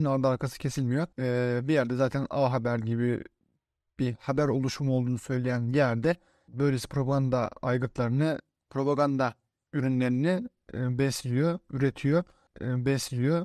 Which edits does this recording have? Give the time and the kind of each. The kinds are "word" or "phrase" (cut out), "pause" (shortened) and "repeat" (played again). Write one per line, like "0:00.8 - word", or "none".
0:01.1 - pause
0:12.5 - repeat